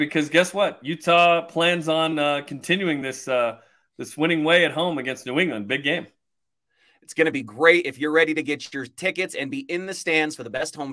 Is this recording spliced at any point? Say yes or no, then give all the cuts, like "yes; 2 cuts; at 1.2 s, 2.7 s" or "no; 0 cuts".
no; 0 cuts